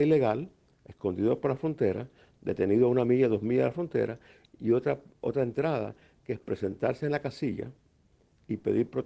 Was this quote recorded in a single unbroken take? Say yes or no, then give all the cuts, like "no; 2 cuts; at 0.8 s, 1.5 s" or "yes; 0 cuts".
yes; 0 cuts